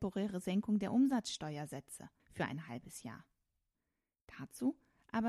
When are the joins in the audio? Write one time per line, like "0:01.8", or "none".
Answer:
none